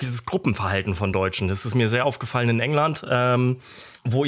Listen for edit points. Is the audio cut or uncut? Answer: uncut